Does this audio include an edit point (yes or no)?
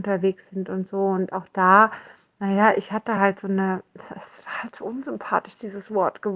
no